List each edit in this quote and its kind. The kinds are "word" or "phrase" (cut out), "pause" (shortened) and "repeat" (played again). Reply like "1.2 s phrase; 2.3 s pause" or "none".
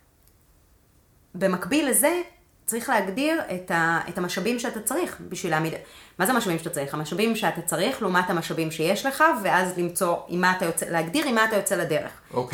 none